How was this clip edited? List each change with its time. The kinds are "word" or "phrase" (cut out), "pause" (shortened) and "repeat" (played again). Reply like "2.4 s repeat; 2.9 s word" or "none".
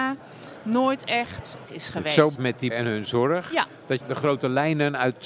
1.7 s word; 2.4 s word; 2.7 s word; 4.0 s word